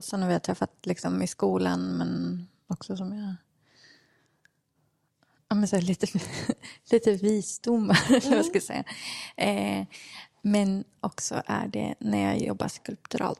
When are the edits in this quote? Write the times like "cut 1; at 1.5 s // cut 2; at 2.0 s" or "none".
none

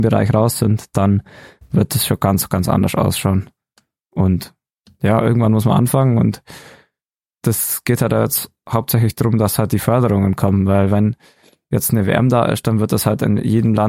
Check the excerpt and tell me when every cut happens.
none

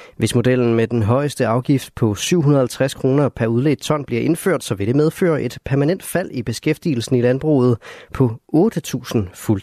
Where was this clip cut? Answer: none

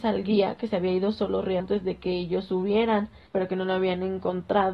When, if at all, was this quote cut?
cut 1; at 1.6 s // cut 2; at 3.3 s

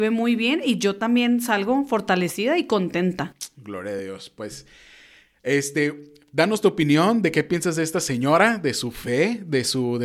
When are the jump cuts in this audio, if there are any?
none

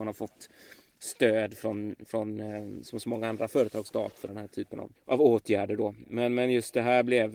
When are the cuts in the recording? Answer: cut 1; at 3.8 s // cut 2; at 4.3 s // cut 3; at 4.9 s

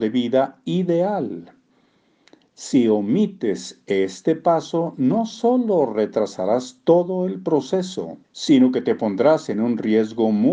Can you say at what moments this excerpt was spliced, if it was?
cut 1; at 8.2 s

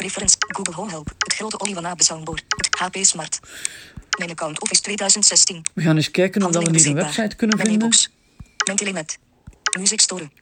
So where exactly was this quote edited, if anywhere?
none

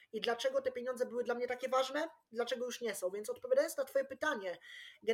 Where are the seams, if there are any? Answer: none

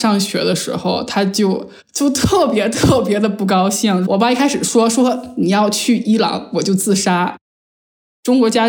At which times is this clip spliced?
cut 1; at 1.8 s

